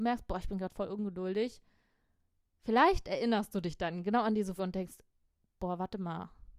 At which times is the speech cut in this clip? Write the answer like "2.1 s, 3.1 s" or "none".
4.6 s